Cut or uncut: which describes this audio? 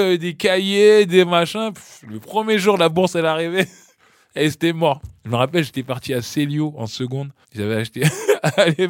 cut